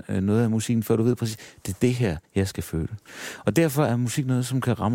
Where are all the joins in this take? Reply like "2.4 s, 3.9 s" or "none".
2.2 s